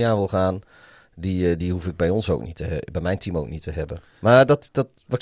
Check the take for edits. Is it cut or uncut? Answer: uncut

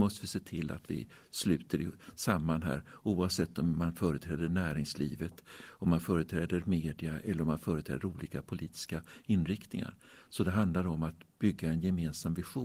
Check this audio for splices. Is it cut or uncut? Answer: uncut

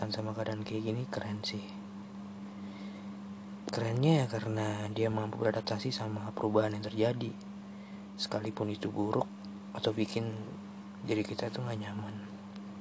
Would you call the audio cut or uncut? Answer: uncut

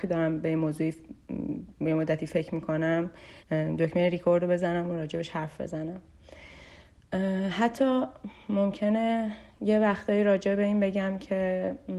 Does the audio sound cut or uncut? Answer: cut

